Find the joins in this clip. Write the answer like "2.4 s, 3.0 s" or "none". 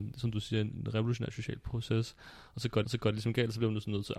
2.8 s